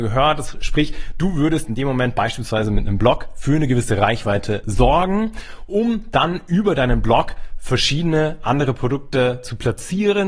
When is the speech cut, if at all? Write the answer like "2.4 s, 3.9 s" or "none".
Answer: none